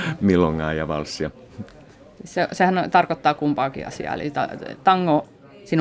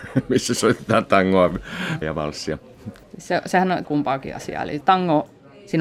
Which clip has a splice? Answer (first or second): second